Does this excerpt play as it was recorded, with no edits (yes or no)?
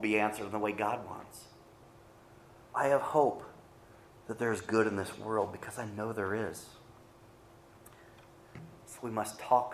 yes